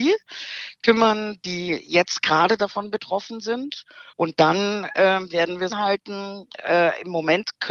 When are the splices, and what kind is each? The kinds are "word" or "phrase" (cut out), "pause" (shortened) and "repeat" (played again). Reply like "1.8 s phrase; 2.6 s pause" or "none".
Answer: 4.1 s pause; 5.7 s phrase